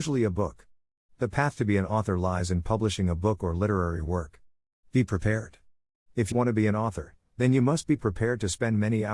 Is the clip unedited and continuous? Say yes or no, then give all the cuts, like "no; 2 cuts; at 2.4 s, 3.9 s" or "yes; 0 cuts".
no; 1 cut; at 6.3 s